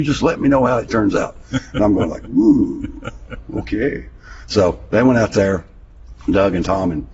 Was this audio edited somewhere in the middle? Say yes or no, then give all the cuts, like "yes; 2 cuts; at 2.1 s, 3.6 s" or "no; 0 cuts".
no; 0 cuts